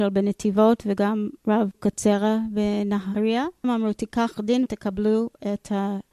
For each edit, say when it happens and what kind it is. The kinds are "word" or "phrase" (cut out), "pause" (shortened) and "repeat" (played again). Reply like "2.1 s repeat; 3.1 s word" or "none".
1.7 s word; 3.6 s word; 4.3 s word; 4.7 s word